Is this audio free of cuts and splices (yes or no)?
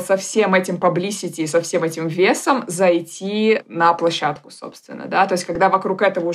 yes